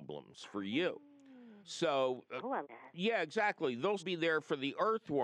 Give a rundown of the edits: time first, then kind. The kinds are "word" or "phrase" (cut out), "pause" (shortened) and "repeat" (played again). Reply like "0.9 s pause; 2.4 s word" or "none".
1.6 s pause; 2.6 s word; 4.0 s word